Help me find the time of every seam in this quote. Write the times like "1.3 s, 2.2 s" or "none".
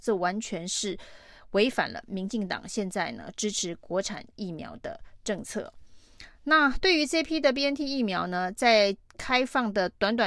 6.3 s, 9.1 s